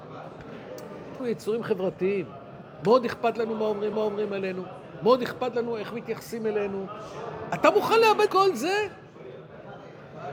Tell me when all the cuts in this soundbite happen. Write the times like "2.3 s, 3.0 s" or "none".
1.2 s, 3.9 s, 8.3 s